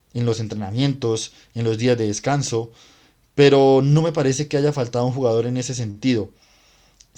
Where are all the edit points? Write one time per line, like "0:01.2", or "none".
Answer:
none